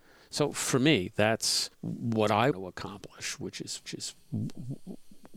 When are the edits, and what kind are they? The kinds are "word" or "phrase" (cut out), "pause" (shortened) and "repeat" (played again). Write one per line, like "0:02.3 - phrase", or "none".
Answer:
0:01.7 - pause
0:02.5 - word
0:03.8 - repeat